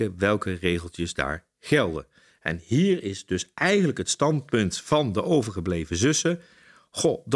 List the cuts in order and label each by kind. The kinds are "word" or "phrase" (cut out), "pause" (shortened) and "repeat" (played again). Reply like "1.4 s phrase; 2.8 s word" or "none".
none